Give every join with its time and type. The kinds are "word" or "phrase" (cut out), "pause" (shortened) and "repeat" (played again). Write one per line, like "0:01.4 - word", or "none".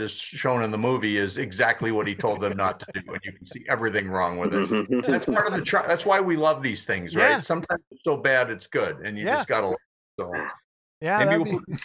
none